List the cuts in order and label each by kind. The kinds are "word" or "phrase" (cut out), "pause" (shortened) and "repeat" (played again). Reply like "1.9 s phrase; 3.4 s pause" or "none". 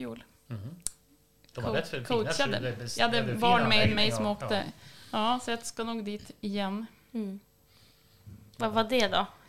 none